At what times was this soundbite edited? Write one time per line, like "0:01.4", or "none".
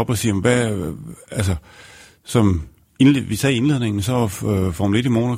none